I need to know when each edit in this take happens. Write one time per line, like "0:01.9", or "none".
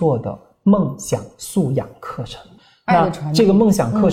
none